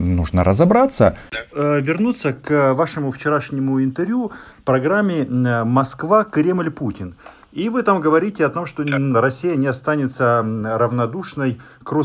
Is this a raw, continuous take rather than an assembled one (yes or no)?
yes